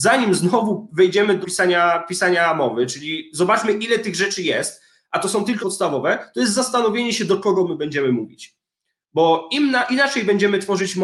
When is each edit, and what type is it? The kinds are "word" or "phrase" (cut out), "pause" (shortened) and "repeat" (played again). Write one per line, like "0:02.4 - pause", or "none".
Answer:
0:01.4 - word
0:05.6 - word